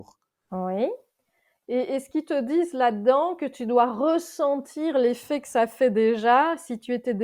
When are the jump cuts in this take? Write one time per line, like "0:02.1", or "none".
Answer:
none